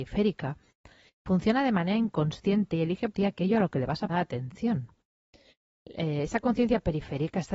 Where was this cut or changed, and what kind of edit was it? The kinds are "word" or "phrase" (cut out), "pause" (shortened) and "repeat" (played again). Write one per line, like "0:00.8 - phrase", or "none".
0:03.1 - word
0:04.1 - word